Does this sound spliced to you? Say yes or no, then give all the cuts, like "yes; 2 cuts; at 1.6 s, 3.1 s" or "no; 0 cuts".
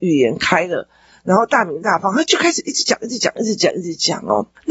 no; 0 cuts